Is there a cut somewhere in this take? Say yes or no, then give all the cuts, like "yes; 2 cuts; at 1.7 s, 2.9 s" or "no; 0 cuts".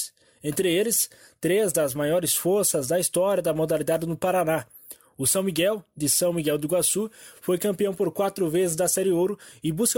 no; 0 cuts